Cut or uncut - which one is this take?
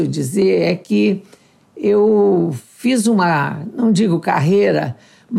uncut